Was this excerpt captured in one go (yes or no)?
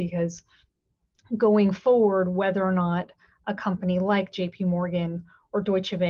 yes